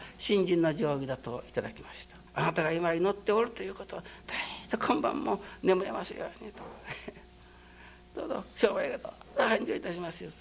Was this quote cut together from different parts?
yes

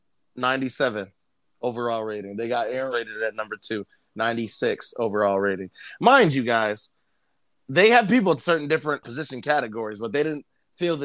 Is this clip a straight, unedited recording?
no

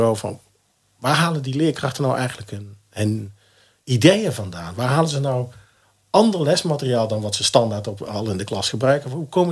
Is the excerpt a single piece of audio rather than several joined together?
yes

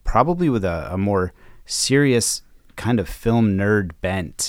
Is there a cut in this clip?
no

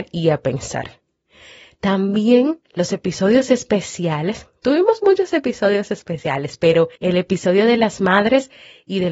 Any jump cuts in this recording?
yes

